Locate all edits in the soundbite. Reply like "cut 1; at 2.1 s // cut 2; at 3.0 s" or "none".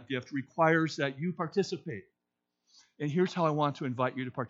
none